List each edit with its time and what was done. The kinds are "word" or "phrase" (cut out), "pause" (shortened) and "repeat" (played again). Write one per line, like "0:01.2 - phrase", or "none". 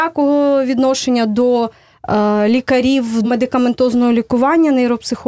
0:03.2 - word